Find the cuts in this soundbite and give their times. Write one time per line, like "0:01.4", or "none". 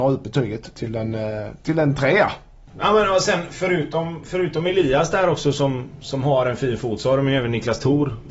none